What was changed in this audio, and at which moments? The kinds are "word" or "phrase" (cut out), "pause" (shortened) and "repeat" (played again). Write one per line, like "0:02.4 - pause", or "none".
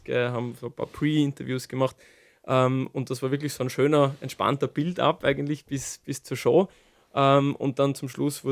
none